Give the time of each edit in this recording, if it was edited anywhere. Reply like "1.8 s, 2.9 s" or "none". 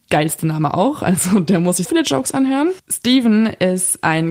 1.8 s

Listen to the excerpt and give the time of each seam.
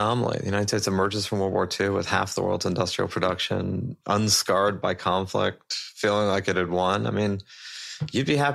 none

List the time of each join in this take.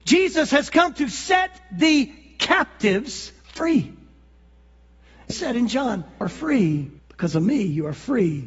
3.4 s, 5.3 s, 6.2 s, 7.0 s

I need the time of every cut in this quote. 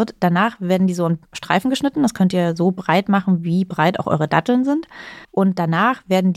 5.2 s

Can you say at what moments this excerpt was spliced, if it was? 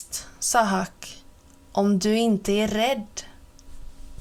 none

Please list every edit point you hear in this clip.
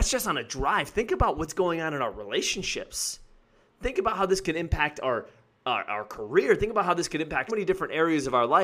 7.5 s

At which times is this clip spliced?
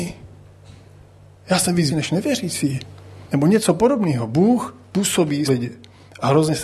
1.9 s, 3.3 s, 5.5 s

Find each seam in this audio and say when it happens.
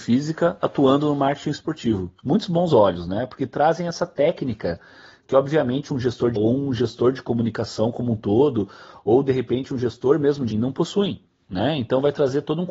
2.2 s, 6.4 s, 10.5 s

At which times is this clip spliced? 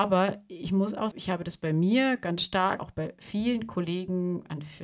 1.1 s, 2.8 s

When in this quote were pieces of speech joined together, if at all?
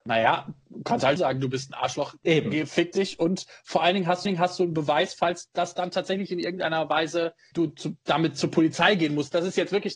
1.2 s, 2.2 s, 4.3 s, 7.5 s

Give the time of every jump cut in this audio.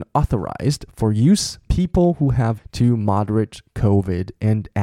1.7 s, 2.6 s

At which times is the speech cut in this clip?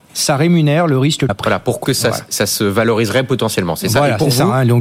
1.3 s, 1.8 s

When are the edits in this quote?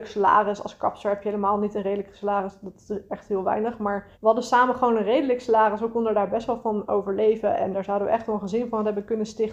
4.1 s, 7.7 s

